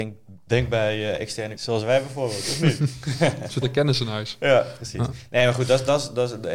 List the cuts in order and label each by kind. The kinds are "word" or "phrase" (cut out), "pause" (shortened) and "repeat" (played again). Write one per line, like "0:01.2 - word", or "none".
0:01.6 - word
0:03.6 - word

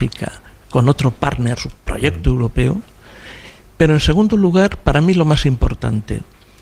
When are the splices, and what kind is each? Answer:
0:01.6 - word

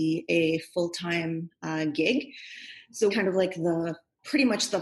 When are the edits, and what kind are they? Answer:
0:03.1 - phrase

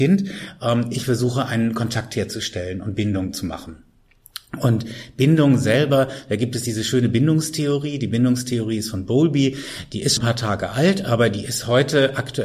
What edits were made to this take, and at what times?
0:10.2 - word

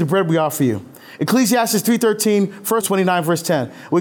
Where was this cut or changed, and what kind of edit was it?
0:02.8 - word

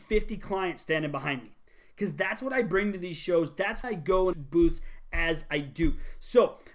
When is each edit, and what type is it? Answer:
0:03.8 - word
0:04.3 - word

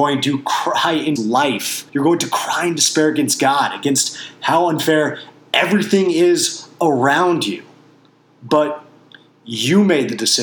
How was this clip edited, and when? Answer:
0:01.2 - phrase
0:01.9 - pause

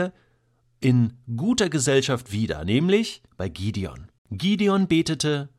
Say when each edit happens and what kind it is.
0:03.3 - pause
0:04.2 - pause

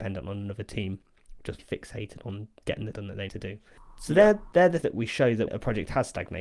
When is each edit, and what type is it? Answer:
0:01.6 - word
0:02.9 - word
0:03.3 - word
0:04.8 - word
0:05.5 - word

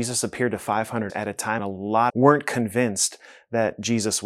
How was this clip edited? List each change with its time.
0:01.1 - word
0:01.6 - word
0:02.1 - phrase

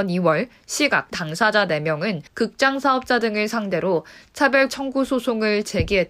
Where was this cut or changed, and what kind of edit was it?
0:01.1 - phrase
0:02.3 - pause
0:04.7 - word

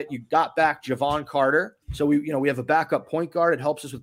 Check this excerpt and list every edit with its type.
0:01.8 - pause

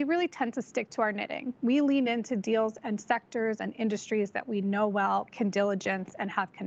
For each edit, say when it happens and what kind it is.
none

